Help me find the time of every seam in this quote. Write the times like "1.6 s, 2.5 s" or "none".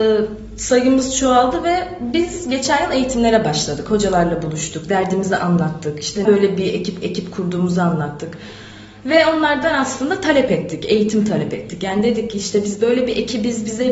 6.2 s, 7.0 s